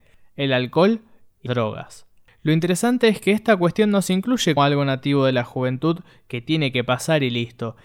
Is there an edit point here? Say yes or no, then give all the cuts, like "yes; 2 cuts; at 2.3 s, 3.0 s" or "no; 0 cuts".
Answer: yes; 2 cuts; at 1.5 s, 4.6 s